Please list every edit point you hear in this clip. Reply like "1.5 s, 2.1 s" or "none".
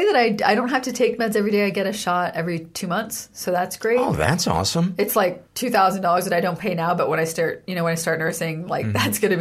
5.5 s